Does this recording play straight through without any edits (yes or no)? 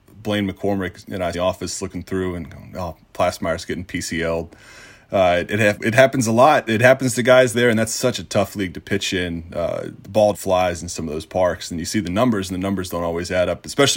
no